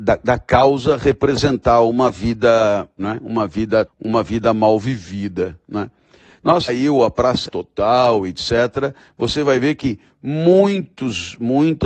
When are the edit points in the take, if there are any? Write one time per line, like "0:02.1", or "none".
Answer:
0:03.0
0:03.9
0:06.7
0:07.5